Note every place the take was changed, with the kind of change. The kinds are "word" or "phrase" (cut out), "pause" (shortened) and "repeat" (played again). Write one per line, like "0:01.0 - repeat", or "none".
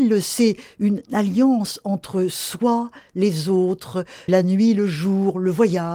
0:04.3 - word